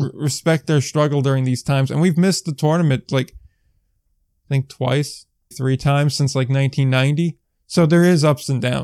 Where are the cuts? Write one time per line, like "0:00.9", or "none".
0:05.5

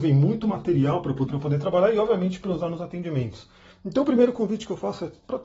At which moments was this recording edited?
0:01.3

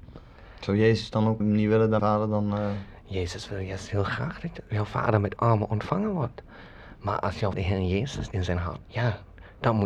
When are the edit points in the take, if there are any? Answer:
0:01.4
0:02.0
0:05.4
0:07.5
0:08.3
0:08.8

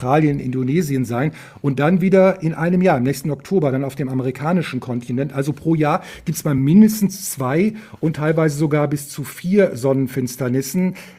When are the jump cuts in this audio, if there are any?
none

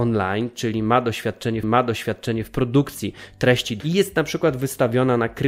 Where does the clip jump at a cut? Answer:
0:01.6
0:03.8

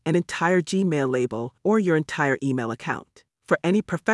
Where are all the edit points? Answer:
0:01.6

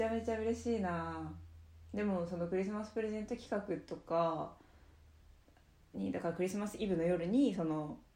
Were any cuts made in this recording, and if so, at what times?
none

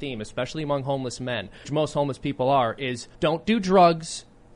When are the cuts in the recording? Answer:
0:01.6
0:03.1

